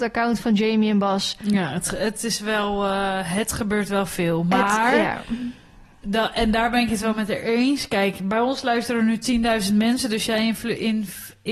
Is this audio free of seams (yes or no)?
yes